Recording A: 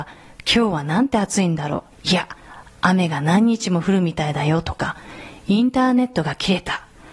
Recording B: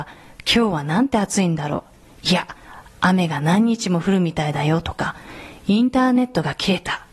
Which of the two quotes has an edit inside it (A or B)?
A